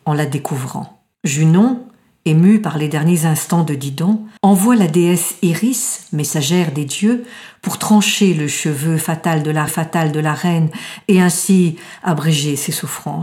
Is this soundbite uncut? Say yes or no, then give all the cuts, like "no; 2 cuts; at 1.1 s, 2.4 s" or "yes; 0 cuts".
no; 3 cuts; at 1.1 s, 4.4 s, 9.7 s